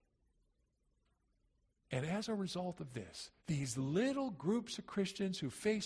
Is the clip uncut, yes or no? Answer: no